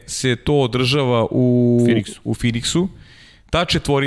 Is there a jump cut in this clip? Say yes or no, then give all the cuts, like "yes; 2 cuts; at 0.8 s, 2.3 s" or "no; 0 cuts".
no; 0 cuts